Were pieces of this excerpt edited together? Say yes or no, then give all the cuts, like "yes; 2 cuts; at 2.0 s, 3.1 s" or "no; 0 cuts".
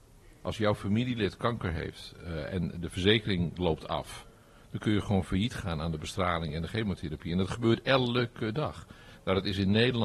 no; 0 cuts